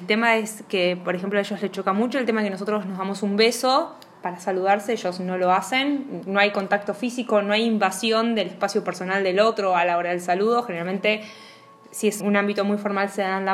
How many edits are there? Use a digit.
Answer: 1